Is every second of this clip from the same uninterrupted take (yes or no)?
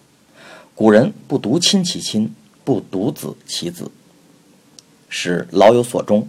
yes